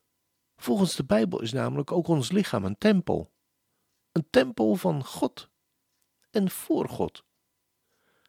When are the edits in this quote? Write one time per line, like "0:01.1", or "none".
none

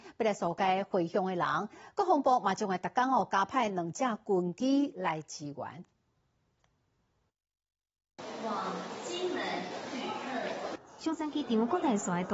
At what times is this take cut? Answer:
none

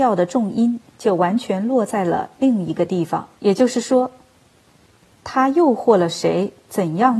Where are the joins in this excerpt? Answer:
0:03.4

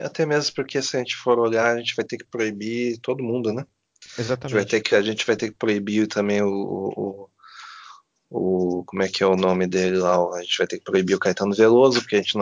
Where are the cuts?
none

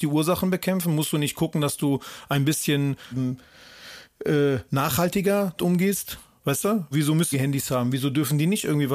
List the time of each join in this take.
0:03.1
0:05.6
0:06.9
0:07.3

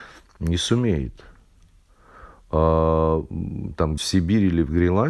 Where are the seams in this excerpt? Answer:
0:04.0

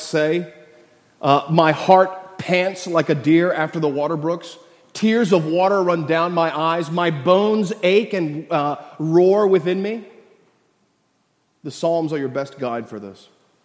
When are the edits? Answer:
none

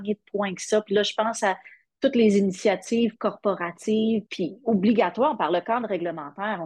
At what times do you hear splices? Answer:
0:04.3

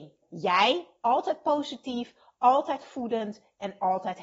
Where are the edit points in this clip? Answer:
none

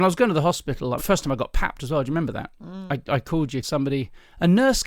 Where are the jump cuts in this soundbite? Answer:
0:01.0
0:03.6

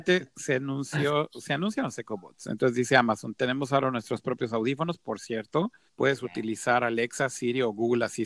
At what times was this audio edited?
0:05.9

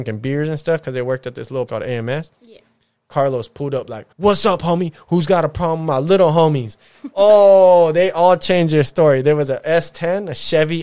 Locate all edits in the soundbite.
0:01.7
0:04.1

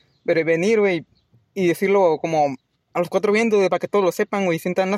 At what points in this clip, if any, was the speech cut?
none

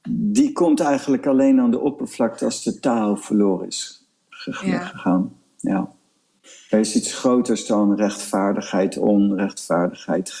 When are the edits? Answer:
none

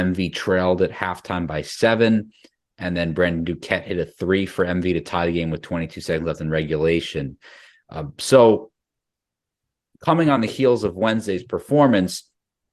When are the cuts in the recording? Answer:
none

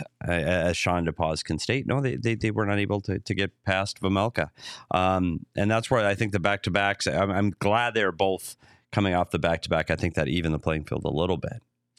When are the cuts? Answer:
none

